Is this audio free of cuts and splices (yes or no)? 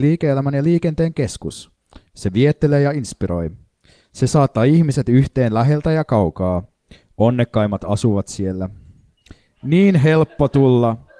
yes